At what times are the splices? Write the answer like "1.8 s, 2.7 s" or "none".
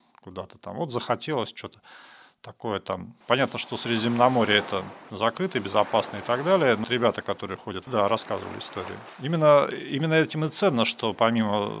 3.2 s, 5.1 s, 6.8 s, 7.9 s